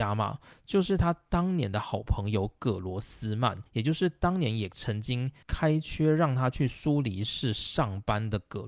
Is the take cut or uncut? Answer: cut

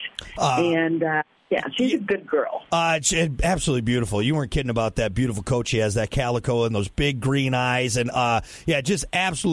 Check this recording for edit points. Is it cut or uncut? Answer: cut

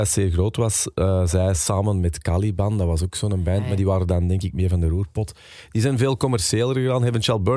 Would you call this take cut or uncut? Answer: uncut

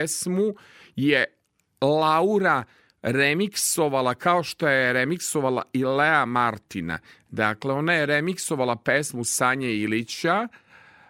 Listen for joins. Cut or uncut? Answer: uncut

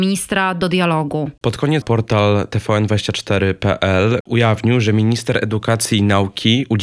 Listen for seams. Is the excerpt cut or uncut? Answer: cut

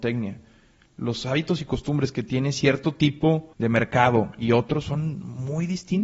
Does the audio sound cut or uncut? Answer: cut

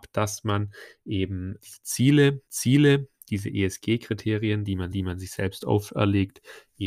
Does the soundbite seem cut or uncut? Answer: cut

